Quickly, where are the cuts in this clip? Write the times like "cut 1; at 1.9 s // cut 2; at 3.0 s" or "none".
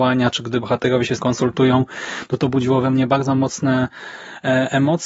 cut 1; at 1.2 s